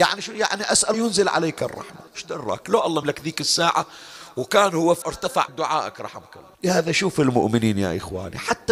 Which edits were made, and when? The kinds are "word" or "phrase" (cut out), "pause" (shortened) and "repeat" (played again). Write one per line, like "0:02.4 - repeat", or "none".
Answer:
0:00.9 - word
0:02.1 - pause
0:03.0 - word
0:05.0 - word
0:05.5 - phrase
0:06.5 - pause